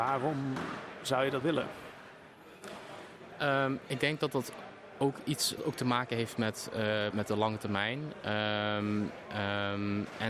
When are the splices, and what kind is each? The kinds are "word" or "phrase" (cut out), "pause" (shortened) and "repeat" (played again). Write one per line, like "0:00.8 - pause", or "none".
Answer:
0:01.4 - word
0:05.6 - word
0:07.1 - word